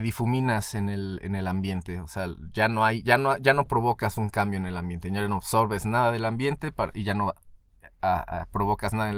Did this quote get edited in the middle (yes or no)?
no